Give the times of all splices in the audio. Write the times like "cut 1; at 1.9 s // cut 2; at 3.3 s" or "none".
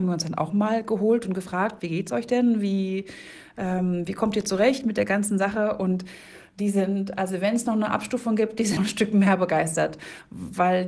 cut 1; at 8.8 s

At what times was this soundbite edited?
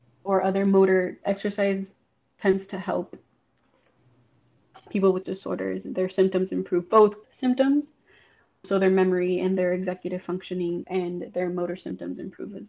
cut 1; at 1.2 s // cut 2; at 4.9 s // cut 3; at 5.2 s // cut 4; at 7.2 s // cut 5; at 8.6 s // cut 6; at 10.8 s

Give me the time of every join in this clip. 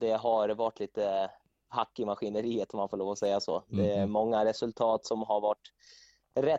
none

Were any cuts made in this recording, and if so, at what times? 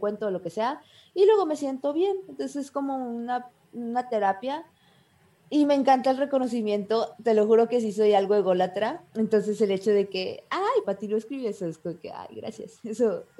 cut 1; at 9.1 s // cut 2; at 10.8 s

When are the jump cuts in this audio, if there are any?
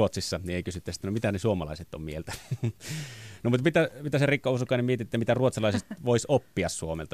none

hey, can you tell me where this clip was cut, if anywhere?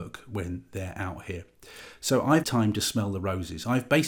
cut 1; at 2.4 s

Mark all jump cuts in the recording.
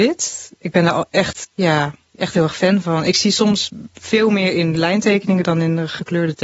cut 1; at 1.4 s

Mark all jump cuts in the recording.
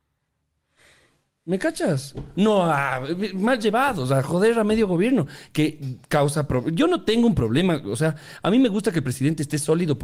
none

